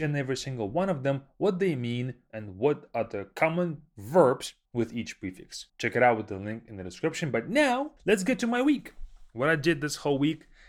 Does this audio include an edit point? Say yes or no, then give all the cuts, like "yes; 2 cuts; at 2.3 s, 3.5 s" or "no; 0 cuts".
yes; 3 cuts; at 4.7 s, 5.7 s, 8.0 s